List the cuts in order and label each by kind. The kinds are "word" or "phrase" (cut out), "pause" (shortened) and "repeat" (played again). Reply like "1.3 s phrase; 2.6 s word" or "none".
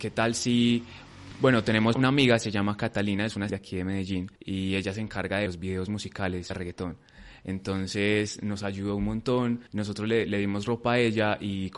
1.9 s word; 3.5 s word; 4.4 s pause; 5.5 s phrase; 6.5 s phrase; 9.7 s pause